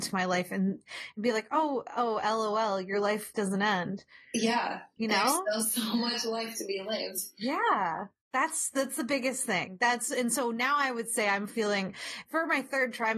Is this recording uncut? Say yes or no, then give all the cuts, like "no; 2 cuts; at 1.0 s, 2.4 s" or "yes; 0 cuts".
yes; 0 cuts